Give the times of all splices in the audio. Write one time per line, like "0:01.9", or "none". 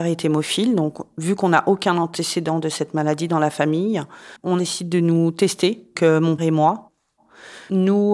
0:04.4
0:06.0
0:06.4